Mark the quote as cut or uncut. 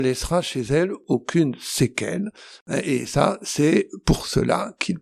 uncut